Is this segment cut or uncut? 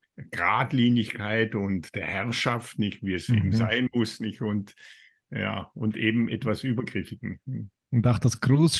uncut